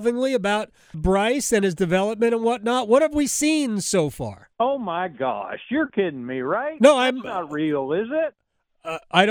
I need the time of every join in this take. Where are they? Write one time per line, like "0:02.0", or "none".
0:00.9
0:04.5